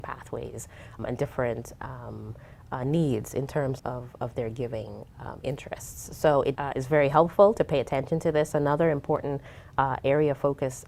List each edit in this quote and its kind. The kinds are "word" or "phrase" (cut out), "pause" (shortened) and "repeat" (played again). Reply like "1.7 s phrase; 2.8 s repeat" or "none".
1.0 s word; 3.8 s word; 6.6 s word